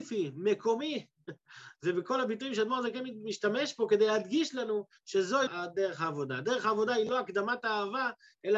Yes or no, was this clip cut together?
yes